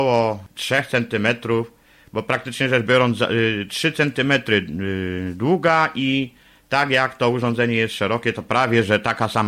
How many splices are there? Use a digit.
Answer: 0